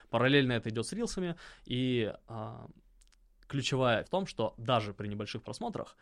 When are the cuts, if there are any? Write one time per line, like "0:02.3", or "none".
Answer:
0:04.0